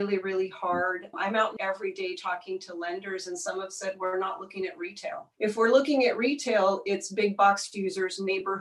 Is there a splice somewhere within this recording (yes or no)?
yes